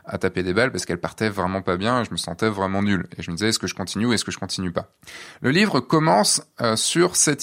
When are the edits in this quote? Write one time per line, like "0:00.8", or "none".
none